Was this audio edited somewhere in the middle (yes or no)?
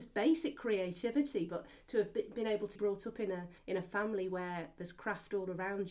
yes